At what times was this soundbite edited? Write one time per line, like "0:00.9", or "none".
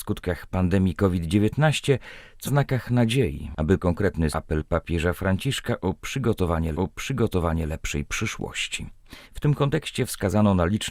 0:02.5
0:03.8
0:04.3
0:06.7
0:09.2